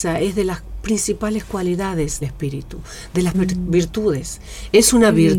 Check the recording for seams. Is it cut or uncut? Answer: cut